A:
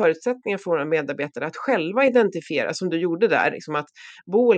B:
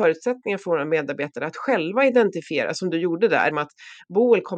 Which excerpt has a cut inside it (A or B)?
B